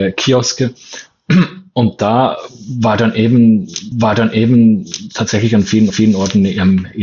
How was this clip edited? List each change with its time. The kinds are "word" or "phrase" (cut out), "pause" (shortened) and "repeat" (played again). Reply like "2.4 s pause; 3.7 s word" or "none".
3.9 s repeat; 5.9 s repeat